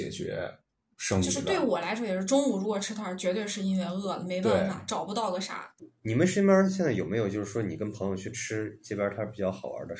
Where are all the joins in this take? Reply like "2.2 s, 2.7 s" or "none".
none